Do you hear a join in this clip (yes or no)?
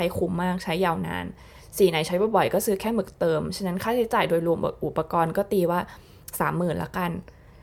no